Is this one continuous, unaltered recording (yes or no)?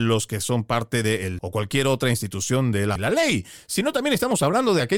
no